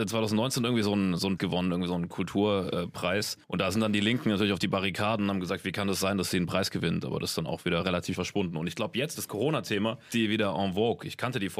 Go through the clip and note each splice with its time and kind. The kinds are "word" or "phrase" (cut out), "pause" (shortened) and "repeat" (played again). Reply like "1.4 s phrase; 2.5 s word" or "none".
1.4 s word; 3.4 s pause; 8.1 s word; 9.1 s word; 10.1 s word